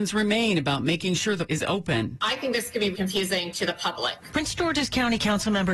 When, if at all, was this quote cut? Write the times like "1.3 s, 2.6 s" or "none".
1.4 s, 2.9 s